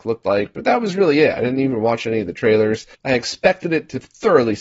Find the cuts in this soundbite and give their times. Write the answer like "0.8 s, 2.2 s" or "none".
2.9 s